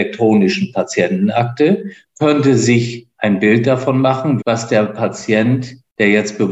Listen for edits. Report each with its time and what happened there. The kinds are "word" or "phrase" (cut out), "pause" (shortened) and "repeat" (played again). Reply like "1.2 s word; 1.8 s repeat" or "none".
4.4 s word